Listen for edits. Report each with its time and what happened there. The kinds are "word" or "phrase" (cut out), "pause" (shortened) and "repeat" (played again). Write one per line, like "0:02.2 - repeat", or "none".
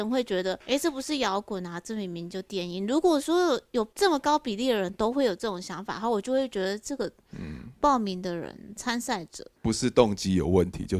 0:09.6 - pause